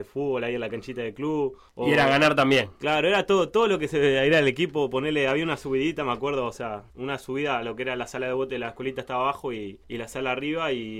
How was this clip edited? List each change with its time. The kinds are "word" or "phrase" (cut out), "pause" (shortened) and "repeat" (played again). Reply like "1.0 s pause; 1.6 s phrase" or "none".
1.7 s pause; 6.9 s pause; 9.8 s pause